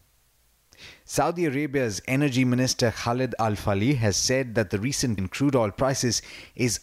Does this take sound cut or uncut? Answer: cut